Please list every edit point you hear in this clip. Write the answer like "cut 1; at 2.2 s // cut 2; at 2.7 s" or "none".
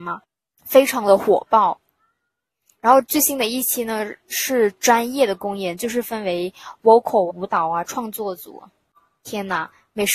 cut 1; at 7.3 s